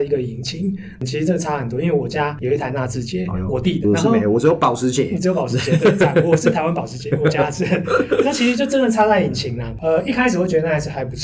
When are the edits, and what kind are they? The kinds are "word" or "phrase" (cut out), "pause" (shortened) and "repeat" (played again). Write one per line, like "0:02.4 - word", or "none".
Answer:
0:03.8 - word